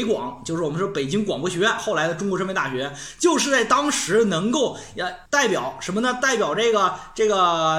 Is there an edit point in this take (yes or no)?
yes